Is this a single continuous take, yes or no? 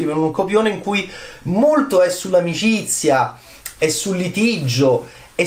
yes